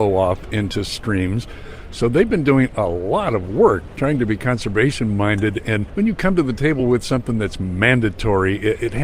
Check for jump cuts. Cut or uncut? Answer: uncut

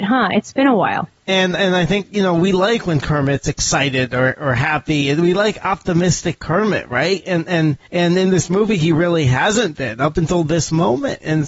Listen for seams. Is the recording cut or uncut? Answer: cut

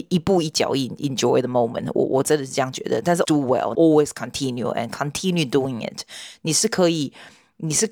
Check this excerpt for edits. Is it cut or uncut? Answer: cut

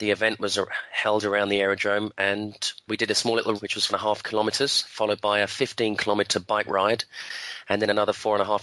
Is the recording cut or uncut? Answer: cut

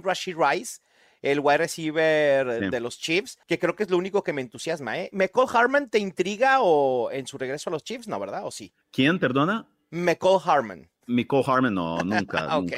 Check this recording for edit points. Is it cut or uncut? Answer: cut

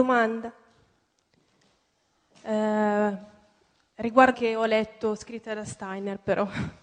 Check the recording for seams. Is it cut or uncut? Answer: cut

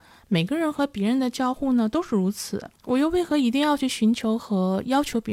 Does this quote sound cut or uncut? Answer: cut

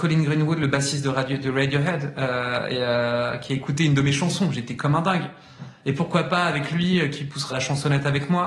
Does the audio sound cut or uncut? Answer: cut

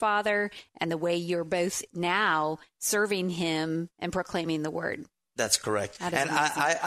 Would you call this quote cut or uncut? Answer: uncut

